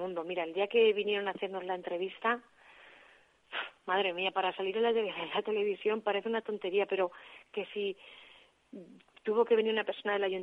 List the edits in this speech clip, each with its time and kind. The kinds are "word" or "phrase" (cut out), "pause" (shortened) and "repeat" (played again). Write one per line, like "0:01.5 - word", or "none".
none